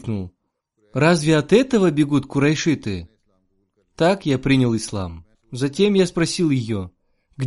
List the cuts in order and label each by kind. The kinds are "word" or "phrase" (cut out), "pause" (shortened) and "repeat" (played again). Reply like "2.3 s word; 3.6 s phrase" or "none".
5.3 s pause